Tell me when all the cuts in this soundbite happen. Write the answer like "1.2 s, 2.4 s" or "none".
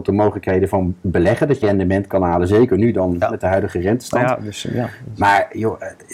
1.6 s